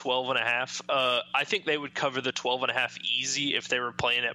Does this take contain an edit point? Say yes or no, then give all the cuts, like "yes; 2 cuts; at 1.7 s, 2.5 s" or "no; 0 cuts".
no; 0 cuts